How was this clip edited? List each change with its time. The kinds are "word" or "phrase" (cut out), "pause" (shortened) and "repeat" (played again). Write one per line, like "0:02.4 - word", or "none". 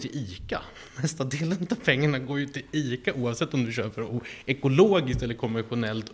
none